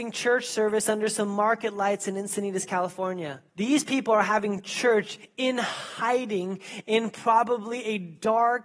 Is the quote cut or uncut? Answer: cut